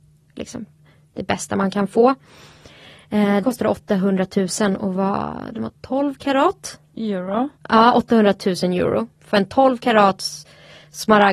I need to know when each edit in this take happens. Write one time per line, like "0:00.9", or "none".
0:03.4
0:07.6